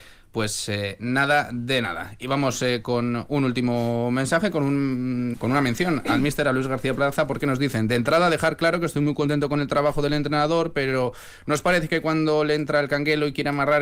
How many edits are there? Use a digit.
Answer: 1